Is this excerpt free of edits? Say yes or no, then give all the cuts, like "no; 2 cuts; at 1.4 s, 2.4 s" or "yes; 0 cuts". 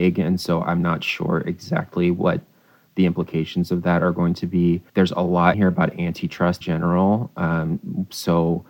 no; 3 cuts; at 4.9 s, 5.5 s, 6.6 s